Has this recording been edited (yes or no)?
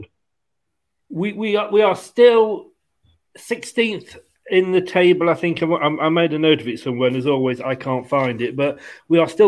no